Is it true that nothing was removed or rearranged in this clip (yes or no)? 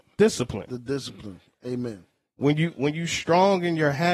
yes